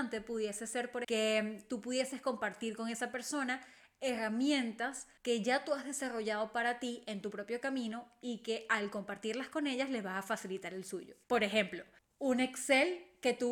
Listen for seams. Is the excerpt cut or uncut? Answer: cut